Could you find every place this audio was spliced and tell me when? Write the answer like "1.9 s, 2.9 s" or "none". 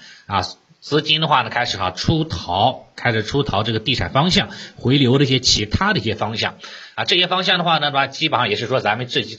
none